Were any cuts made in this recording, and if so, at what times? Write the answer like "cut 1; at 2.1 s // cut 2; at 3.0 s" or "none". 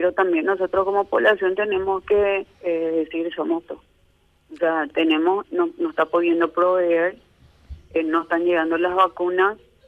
cut 1; at 2.5 s // cut 2; at 3.6 s // cut 3; at 5.4 s